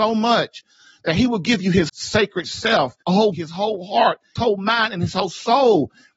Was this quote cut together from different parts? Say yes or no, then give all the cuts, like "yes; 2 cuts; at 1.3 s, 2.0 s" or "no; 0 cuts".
yes; 4 cuts; at 1.9 s, 3.0 s, 3.3 s, 4.4 s